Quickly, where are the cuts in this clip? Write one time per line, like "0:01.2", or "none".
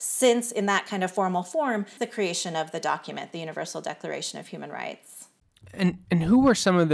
0:02.0